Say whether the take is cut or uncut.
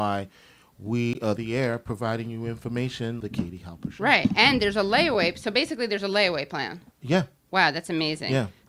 cut